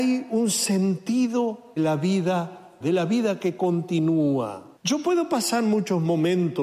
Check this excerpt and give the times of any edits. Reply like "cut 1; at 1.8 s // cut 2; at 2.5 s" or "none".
cut 1; at 1.8 s // cut 2; at 2.8 s // cut 3; at 4.8 s

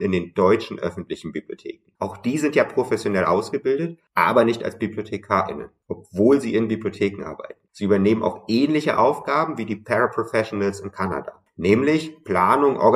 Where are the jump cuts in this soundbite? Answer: cut 1; at 1.9 s // cut 2; at 7.7 s

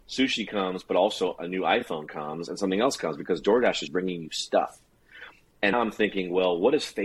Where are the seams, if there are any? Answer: cut 1; at 3.9 s // cut 2; at 5.7 s

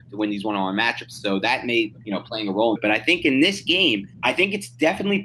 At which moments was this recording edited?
cut 1; at 2.0 s // cut 2; at 2.8 s // cut 3; at 4.1 s

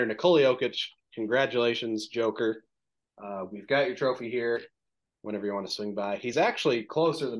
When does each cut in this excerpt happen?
none

